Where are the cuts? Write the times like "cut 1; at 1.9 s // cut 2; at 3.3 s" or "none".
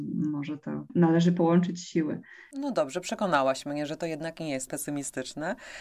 cut 1; at 4.7 s